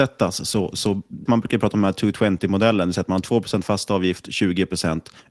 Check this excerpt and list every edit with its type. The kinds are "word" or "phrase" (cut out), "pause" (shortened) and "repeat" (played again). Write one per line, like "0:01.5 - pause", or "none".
0:01.3 - word